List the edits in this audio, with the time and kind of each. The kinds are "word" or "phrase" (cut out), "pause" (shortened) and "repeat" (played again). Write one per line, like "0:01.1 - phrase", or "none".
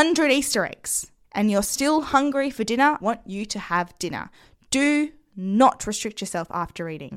0:01.2 - pause
0:03.0 - word